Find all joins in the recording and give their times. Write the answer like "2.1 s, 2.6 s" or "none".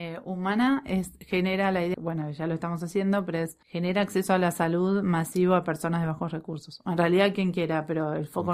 1.9 s, 3.6 s

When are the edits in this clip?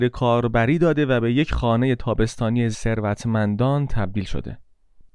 2.7 s

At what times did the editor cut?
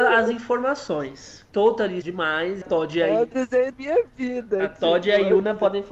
2.0 s, 2.6 s, 3.7 s

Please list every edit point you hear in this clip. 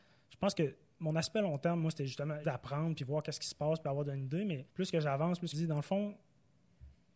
2.4 s, 4.7 s, 5.5 s

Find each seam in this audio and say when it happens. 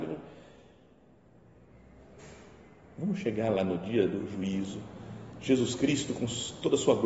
none

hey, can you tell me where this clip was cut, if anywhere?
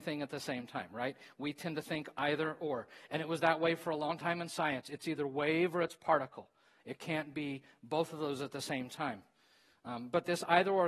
none

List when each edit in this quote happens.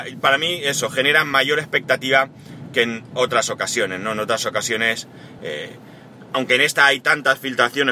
none

